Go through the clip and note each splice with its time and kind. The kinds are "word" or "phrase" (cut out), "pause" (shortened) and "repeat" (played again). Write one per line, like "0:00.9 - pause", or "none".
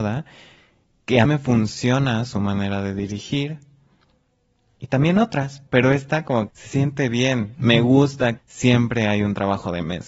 0:01.2 - word
0:05.7 - word
0:06.5 - word
0:08.4 - word

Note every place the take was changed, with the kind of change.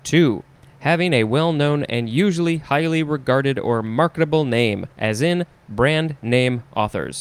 0:04.9 - pause

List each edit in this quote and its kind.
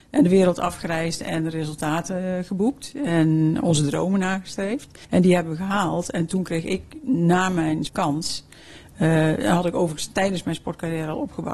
0:05.0 - pause
0:07.9 - phrase

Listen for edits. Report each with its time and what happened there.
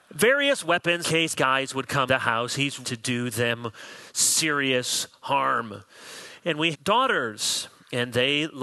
0:01.0 - word
0:01.3 - word
0:02.1 - word
0:02.8 - word
0:06.7 - word

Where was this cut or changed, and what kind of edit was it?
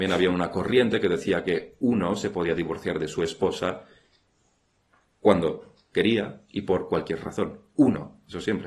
none

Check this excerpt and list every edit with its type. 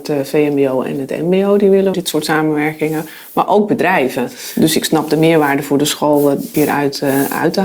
0:01.9 - phrase
0:06.5 - phrase

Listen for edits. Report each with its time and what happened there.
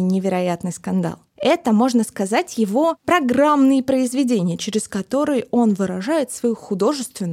0:01.3 - pause

